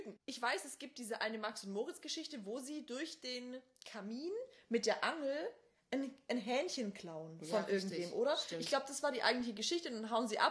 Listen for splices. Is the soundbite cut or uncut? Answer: uncut